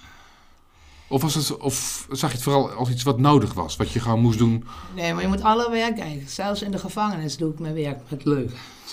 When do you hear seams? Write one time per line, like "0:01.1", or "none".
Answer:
none